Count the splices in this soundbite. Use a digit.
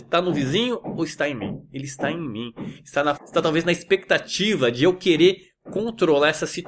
1